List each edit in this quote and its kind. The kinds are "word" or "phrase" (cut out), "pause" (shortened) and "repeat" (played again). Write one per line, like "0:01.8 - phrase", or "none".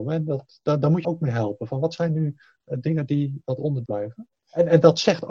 0:01.0 - word
0:02.4 - pause
0:03.9 - word

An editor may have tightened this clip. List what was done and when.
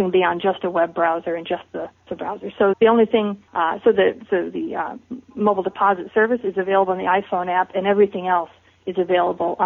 0:02.1 - word
0:02.7 - word
0:03.5 - pause

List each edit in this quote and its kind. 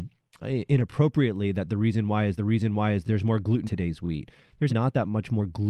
0:02.4 - repeat
0:03.7 - word
0:04.7 - word

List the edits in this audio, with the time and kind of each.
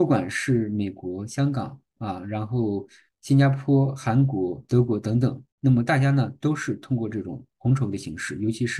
0:05.5 - pause

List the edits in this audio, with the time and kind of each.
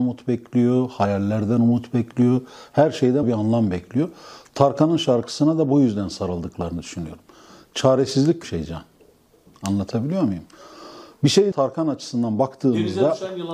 0:03.2 - word
0:08.4 - phrase
0:11.5 - phrase

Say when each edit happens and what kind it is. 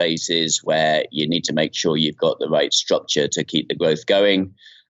none

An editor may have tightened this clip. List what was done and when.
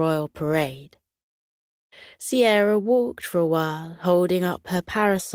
none

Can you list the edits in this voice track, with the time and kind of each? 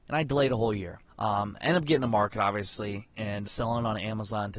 0:01.1 - pause
0:03.4 - word

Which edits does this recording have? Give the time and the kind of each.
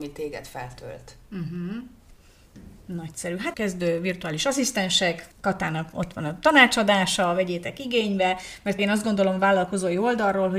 0:03.5 - word
0:05.3 - pause
0:08.8 - word

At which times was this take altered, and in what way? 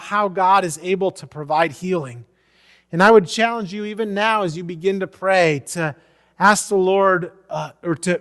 none

